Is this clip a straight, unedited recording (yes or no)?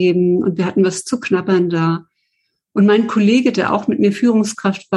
yes